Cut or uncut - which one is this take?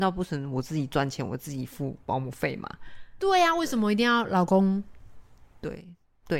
uncut